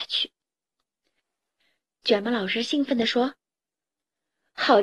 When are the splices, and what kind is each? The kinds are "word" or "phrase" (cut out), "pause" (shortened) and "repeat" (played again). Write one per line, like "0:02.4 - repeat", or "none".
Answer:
none

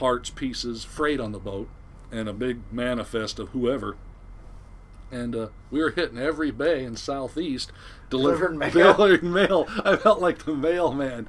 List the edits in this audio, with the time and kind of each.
none

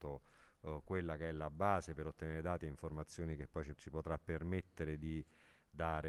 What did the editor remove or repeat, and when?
0:03.7 - word

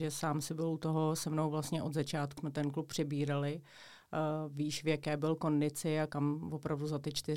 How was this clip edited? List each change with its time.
0:02.4 - word

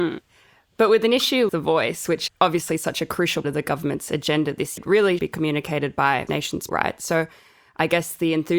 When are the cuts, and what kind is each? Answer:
0:01.5 - word
0:02.3 - word
0:03.4 - word
0:04.8 - word
0:05.2 - word
0:06.3 - word
0:06.7 - word

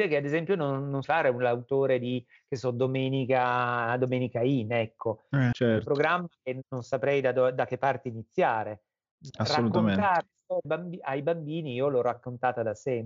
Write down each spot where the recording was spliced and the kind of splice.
0:01.0 - word
0:05.5 - word
0:06.6 - word
0:10.6 - word

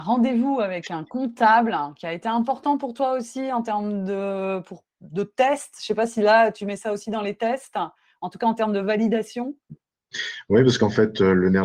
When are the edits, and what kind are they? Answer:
none

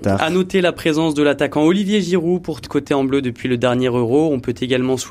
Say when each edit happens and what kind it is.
0:02.6 - word

